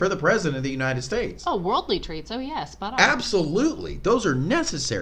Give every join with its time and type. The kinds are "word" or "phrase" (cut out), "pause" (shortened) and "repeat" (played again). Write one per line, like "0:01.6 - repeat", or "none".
none